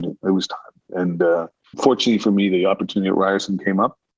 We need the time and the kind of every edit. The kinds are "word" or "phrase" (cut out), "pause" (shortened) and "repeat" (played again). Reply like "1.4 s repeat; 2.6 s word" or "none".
1.6 s pause